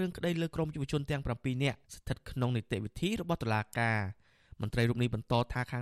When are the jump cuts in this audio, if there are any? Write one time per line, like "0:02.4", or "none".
0:01.9

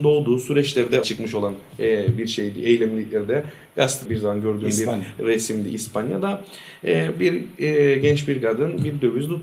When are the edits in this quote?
0:01.0
0:04.0

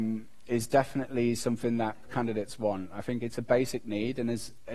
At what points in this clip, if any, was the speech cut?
0:02.1

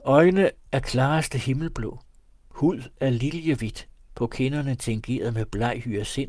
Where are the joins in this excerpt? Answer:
none

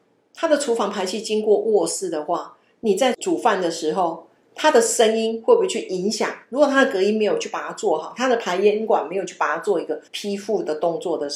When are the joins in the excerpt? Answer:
0:10.1

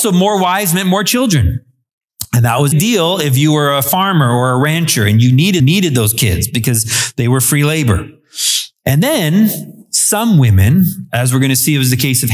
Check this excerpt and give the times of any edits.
0:02.7
0:05.6

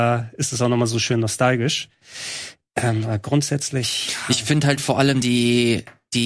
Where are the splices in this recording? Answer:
none

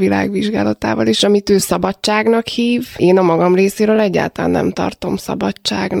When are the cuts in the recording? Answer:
none

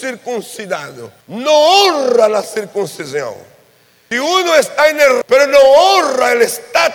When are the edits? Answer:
0:01.2
0:04.1
0:05.2

